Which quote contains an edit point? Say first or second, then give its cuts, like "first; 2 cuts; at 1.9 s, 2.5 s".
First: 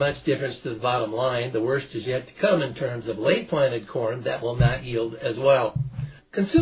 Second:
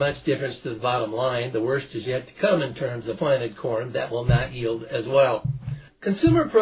second; 1 cut; at 3.2 s